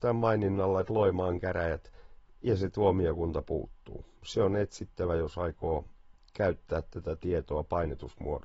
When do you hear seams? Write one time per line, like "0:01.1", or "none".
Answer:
none

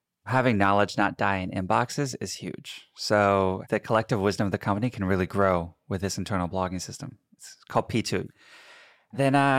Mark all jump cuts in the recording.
none

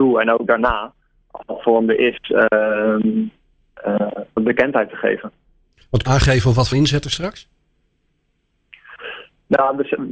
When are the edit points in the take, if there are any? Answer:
0:01.4
0:04.4
0:06.1
0:06.7

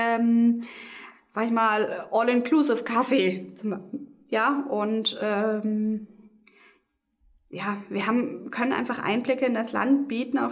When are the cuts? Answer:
none

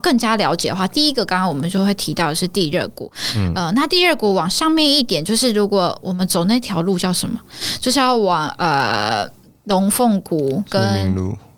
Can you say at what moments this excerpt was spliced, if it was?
none

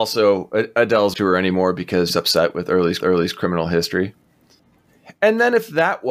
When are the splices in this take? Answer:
0:01.1
0:02.1
0:03.0

